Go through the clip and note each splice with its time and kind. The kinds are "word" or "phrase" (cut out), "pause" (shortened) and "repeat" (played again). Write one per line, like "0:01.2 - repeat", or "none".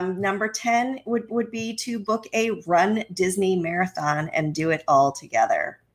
0:01.3 - repeat